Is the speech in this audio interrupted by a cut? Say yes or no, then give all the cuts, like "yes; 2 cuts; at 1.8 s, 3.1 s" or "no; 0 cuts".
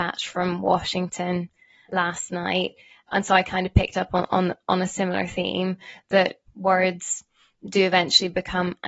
no; 0 cuts